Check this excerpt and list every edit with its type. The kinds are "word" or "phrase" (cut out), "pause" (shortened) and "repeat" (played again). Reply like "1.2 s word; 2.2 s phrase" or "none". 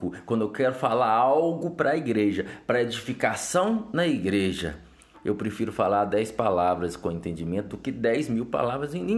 none